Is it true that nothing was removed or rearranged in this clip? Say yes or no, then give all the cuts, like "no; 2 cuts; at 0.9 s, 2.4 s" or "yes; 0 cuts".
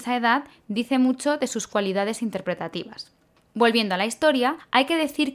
yes; 0 cuts